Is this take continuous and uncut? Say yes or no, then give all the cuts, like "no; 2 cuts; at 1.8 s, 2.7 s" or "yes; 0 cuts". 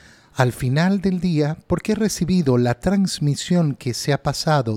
yes; 0 cuts